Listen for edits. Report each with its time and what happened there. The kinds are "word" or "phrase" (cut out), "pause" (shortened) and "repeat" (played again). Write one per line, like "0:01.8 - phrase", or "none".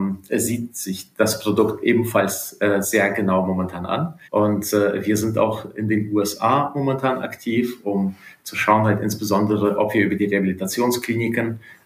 0:04.3 - pause